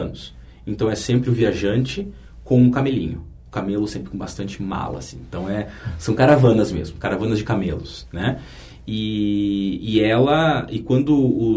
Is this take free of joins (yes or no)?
yes